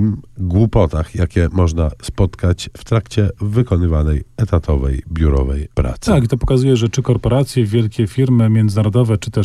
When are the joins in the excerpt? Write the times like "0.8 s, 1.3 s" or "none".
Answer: 5.7 s